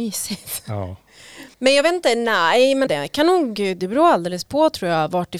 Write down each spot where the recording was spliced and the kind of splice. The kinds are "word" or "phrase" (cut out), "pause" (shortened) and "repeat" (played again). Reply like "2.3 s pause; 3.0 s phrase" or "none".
1.5 s pause; 2.9 s word